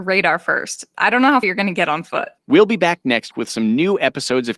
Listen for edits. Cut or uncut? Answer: cut